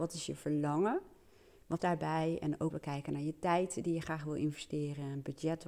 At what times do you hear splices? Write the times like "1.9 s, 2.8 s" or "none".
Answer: 1.8 s, 2.7 s